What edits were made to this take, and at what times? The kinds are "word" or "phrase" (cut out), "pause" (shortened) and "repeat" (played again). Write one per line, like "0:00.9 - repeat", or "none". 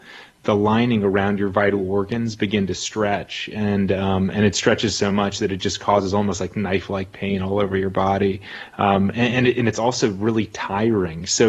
none